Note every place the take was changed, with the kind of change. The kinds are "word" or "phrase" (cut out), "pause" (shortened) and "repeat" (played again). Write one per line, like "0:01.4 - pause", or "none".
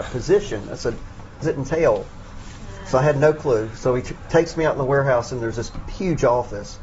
0:01.4 - phrase